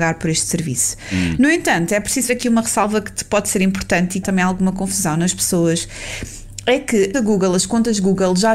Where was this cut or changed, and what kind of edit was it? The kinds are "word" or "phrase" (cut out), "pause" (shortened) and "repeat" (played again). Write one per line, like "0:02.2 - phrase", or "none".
0:02.3 - word
0:04.2 - phrase
0:07.1 - phrase